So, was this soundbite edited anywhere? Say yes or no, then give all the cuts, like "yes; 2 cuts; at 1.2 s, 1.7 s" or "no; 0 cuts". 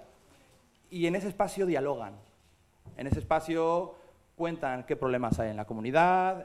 no; 0 cuts